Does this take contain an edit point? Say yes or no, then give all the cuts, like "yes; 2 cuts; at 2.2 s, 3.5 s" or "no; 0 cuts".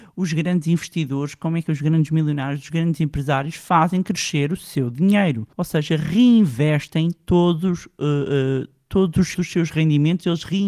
yes; 2 cuts; at 5.5 s, 9.3 s